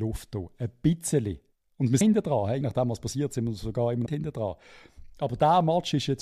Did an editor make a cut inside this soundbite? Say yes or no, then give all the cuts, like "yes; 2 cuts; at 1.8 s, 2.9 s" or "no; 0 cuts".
yes; 4 cuts; at 1.5 s, 2.0 s, 2.6 s, 4.1 s